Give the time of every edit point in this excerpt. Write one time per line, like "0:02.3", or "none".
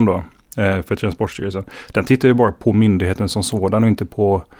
none